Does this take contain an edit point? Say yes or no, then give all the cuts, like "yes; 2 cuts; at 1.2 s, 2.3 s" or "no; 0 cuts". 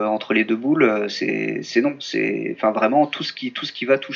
no; 0 cuts